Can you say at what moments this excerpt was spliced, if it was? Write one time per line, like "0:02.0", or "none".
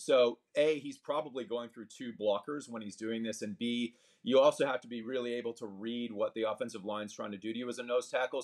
none